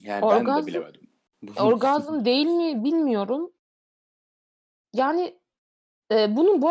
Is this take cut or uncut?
uncut